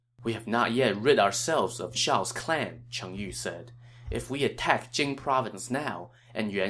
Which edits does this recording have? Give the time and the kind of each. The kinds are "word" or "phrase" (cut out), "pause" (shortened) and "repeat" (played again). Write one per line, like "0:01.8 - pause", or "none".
0:01.9 - word